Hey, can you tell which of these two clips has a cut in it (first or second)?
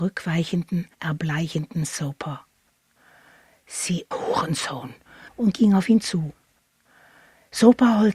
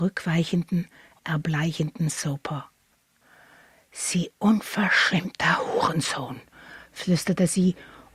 first